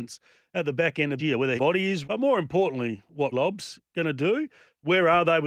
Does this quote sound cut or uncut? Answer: cut